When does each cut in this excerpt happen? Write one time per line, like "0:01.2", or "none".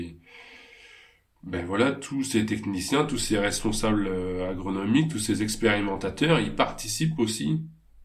none